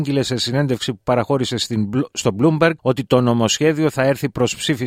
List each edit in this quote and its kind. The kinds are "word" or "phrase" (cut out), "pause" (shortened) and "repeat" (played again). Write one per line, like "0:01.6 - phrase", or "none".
0:02.8 - pause